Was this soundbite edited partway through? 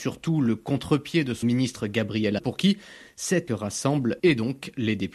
yes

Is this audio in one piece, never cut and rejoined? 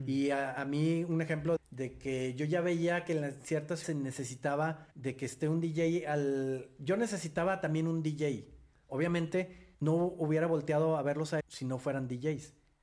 no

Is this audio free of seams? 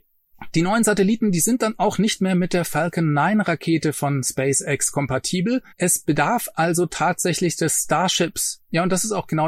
no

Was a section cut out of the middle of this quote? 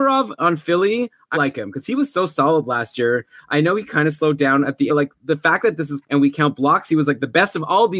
yes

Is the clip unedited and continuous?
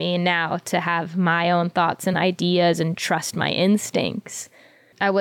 yes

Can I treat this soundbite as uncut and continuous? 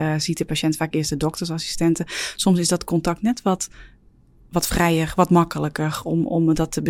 yes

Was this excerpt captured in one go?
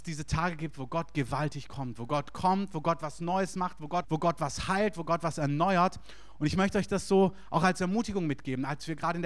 no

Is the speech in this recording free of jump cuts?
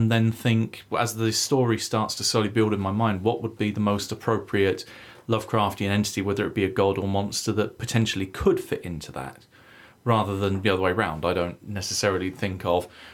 yes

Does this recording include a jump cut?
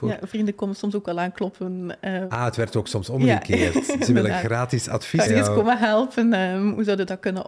yes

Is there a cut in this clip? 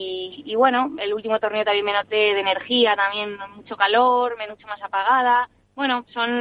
yes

